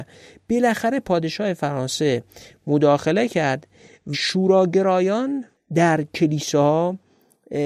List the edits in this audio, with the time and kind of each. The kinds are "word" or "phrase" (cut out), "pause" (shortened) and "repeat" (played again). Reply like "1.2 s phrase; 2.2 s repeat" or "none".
4.1 s word